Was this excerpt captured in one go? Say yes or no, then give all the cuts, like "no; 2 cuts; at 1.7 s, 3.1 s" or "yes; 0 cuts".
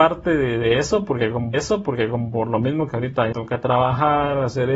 no; 2 cuts; at 1.5 s, 3.3 s